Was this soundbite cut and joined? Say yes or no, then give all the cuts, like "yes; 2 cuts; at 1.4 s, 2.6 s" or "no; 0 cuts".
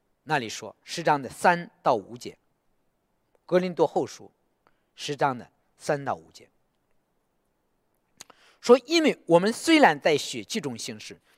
no; 0 cuts